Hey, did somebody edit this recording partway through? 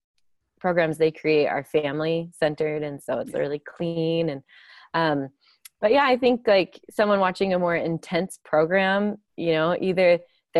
no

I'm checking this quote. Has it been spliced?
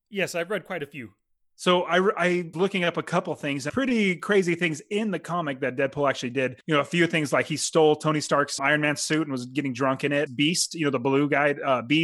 yes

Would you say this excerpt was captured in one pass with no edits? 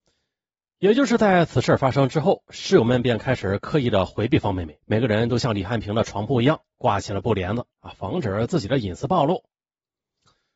no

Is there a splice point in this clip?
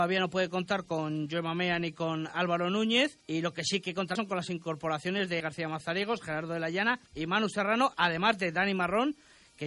yes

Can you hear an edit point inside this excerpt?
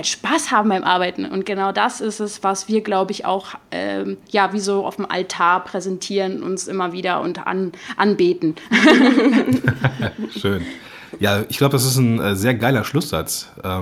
no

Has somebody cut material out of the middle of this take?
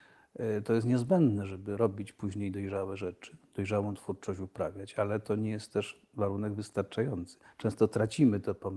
no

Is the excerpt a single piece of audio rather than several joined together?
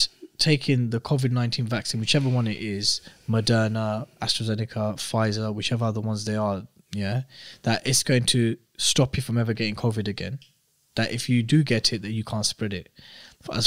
yes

